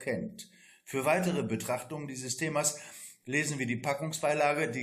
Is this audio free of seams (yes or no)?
yes